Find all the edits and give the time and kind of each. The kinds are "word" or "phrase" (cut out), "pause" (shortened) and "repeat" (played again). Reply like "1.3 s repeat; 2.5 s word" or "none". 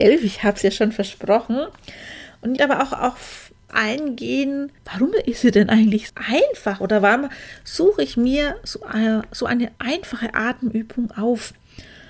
2.6 s phrase; 3.7 s word; 4.8 s pause; 6.1 s word; 9.8 s pause